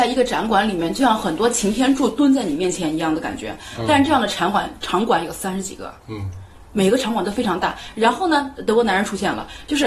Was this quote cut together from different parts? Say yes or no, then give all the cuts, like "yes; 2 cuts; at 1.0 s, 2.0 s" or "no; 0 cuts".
no; 0 cuts